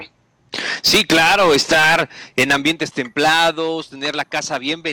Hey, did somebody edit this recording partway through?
no; 0 cuts

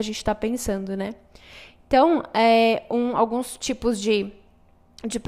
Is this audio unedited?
yes; 0 cuts

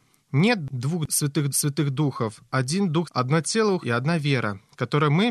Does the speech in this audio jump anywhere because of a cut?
yes; 3 cuts; at 1.5 s, 3.0 s, 3.8 s

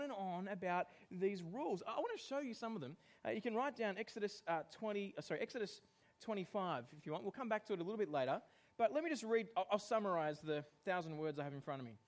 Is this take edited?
no; 0 cuts

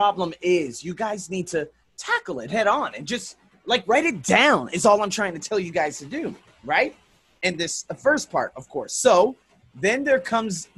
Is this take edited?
no; 0 cuts

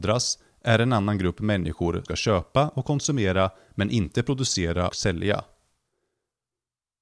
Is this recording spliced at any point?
yes; 2 cuts; at 2.1 s, 4.9 s

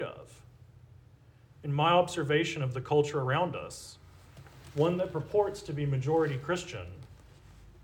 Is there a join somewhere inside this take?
no; 0 cuts

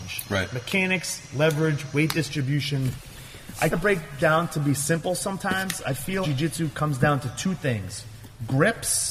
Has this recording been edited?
yes; 3 cuts; at 3.7 s, 4.2 s, 6.2 s

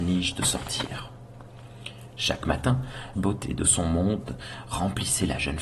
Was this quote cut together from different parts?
yes; 1 cut; at 3.1 s

